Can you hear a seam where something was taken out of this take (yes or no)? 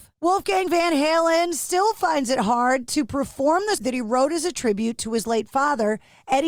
yes